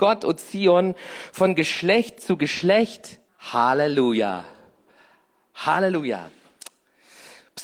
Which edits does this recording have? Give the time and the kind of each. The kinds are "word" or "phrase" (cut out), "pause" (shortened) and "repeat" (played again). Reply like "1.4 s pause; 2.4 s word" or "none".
3.3 s pause